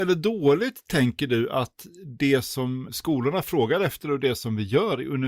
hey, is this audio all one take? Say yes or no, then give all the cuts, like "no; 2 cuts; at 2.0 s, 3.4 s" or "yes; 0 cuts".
no; 1 cut; at 2.9 s